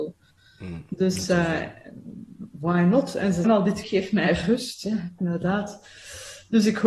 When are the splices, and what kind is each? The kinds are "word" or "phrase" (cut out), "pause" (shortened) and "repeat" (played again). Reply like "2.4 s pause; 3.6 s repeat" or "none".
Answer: 3.4 s phrase; 3.8 s word; 5.2 s word